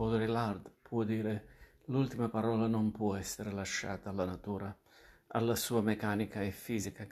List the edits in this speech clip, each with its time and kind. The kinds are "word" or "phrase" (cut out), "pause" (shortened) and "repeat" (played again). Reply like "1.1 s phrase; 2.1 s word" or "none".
none